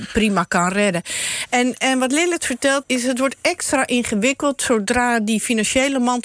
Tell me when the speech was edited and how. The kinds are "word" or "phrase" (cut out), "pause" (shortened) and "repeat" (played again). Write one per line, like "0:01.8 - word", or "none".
0:02.8 - word